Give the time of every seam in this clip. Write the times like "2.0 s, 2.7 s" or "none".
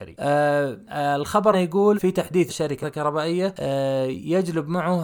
1.5 s, 1.9 s, 2.5 s, 2.8 s